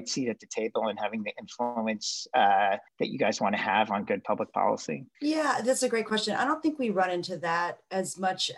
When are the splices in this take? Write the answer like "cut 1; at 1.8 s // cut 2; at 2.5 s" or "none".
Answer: cut 1; at 2.9 s // cut 2; at 5.1 s

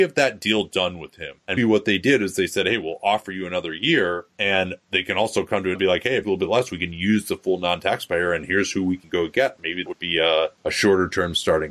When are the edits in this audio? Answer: cut 1; at 1.6 s // cut 2; at 5.7 s // cut 3; at 6.2 s // cut 4; at 9.9 s

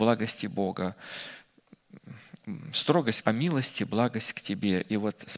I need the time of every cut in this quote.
cut 1; at 3.2 s

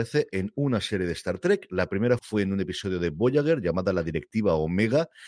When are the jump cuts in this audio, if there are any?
cut 1; at 2.2 s

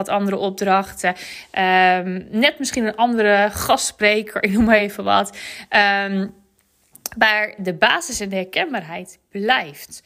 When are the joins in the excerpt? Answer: none

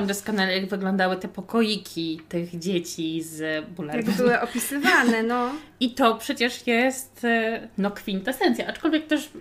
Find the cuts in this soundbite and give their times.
none

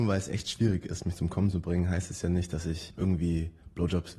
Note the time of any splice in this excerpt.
none

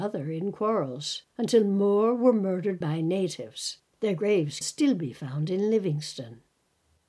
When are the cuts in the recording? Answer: cut 1; at 1.3 s // cut 2; at 2.8 s // cut 3; at 3.9 s // cut 4; at 4.6 s

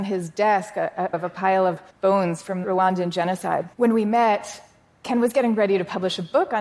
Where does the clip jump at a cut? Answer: cut 1; at 1.1 s // cut 2; at 1.9 s // cut 3; at 2.6 s // cut 4; at 3.7 s

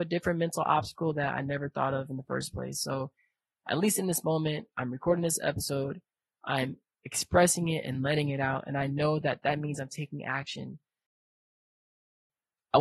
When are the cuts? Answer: none

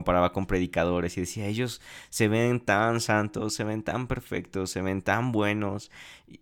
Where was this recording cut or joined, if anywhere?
none

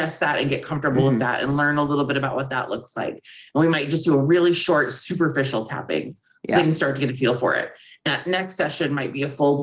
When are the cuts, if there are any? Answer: cut 1; at 8.1 s

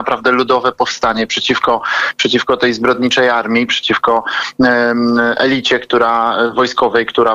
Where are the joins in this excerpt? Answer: none

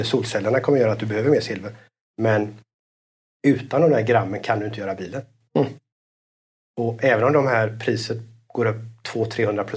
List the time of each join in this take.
none

